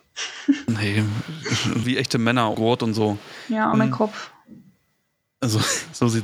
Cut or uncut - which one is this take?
cut